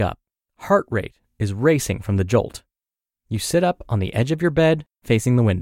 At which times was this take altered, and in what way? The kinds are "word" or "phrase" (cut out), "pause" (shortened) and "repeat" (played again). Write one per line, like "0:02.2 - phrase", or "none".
none